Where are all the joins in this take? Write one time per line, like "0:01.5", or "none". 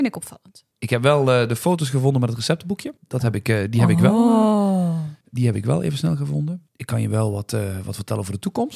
0:03.0
0:05.2

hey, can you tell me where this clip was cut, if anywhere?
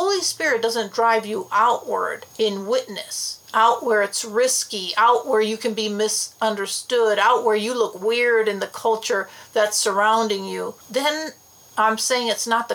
0:02.3
0:03.4
0:10.8

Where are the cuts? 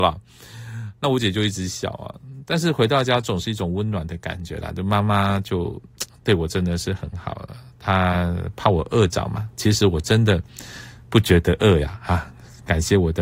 none

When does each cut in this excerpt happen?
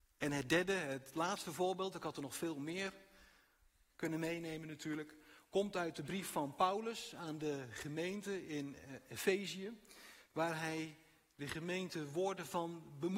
none

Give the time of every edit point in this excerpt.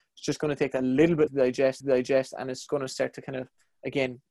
0:01.3
0:01.8
0:02.7

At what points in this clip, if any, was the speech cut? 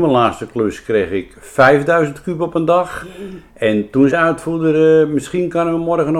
0:04.1

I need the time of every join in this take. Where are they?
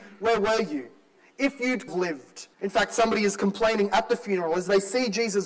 0:01.9
0:02.5

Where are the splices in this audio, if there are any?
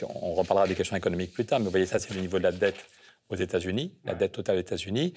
none

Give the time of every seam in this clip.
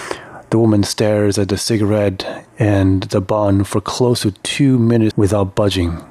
0:05.1

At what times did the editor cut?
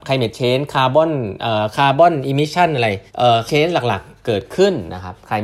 0:03.1
0:03.5

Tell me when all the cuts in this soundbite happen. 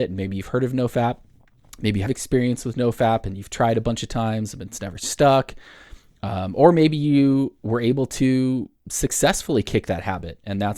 0:02.1

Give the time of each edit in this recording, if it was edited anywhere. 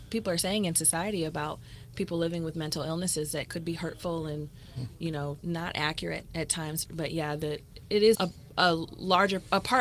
0:05.4
0:06.8
0:08.1

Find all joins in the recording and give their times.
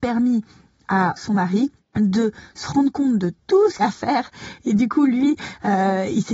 0:01.2
0:03.8

